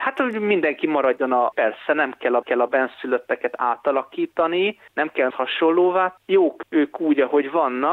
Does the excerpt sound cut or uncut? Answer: cut